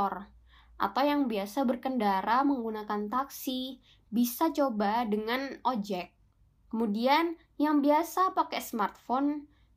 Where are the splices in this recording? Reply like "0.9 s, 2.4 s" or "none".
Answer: none